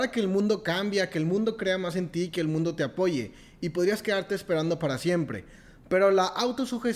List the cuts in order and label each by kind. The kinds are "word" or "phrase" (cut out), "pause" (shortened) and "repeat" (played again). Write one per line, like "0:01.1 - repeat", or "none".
none